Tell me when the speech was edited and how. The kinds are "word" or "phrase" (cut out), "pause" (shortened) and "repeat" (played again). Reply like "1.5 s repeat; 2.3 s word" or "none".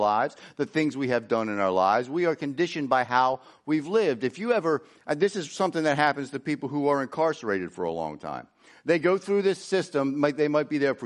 none